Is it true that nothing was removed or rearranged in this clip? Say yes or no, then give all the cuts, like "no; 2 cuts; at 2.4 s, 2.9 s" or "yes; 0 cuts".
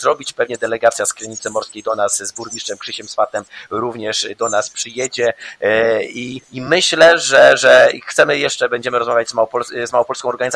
no; 1 cut; at 6.4 s